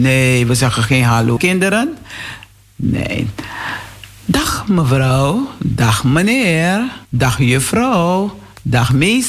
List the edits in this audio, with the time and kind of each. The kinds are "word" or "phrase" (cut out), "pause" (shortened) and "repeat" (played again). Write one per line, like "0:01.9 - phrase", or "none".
0:01.4 - word
0:07.0 - pause